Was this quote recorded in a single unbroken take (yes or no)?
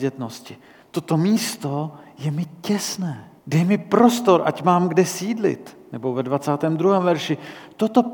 no